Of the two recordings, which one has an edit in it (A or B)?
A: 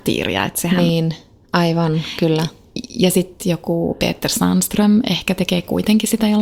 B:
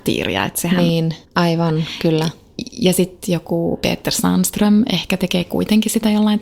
B